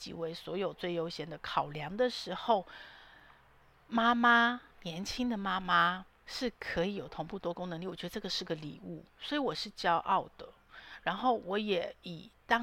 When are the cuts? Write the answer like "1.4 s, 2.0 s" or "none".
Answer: 4.7 s, 6.2 s, 9.1 s